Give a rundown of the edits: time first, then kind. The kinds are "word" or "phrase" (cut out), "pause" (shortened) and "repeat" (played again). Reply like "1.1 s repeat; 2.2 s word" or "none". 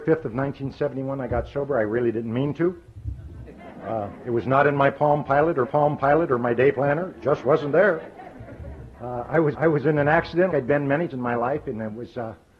5.6 s repeat; 9.5 s repeat; 10.5 s word; 11.1 s word